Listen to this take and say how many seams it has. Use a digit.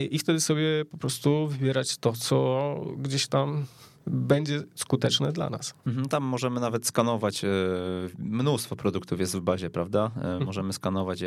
0